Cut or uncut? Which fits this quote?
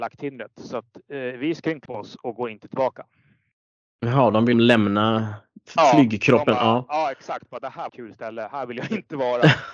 cut